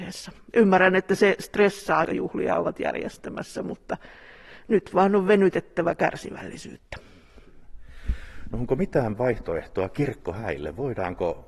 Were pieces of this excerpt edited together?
yes; 1 cut; at 2.0 s

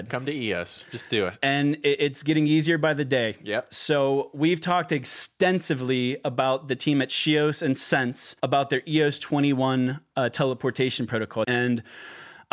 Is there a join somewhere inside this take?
yes; 1 cut; at 8.4 s

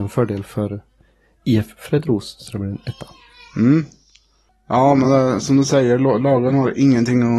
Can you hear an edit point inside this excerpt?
no; 0 cuts

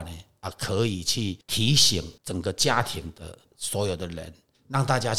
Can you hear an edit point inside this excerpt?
yes; 2 cuts; at 1.4 s, 2.2 s

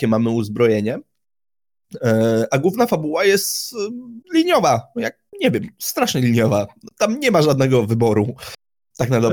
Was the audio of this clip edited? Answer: yes; 2 cuts; at 4.2 s, 5.3 s

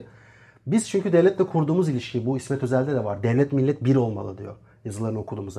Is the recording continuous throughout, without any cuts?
yes; 0 cuts

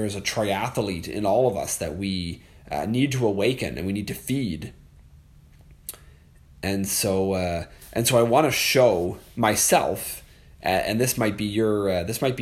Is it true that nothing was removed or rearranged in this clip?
yes; 0 cuts

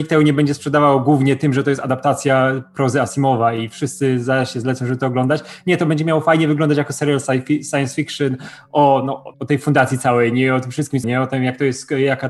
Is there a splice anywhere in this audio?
yes; 2 cuts; at 9.3 s, 11.0 s

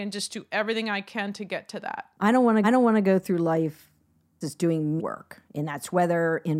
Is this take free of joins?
no; 5 cuts; at 2.1 s, 2.6 s, 4.4 s, 5.0 s, 5.5 s

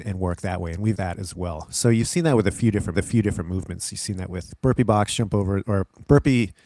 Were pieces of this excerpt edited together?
yes; 2 cuts; at 0.9 s, 2.9 s

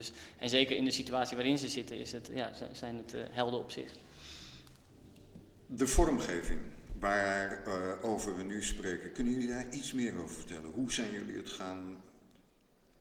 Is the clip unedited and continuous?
yes; 0 cuts

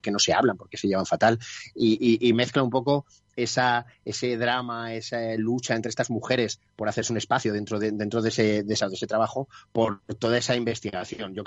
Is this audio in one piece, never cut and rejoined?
no; 1 cut; at 8.8 s

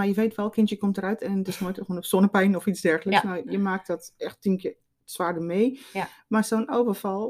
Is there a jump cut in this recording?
no; 0 cuts

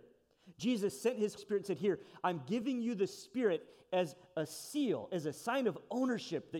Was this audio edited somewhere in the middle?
yes; 1 cut; at 1.4 s

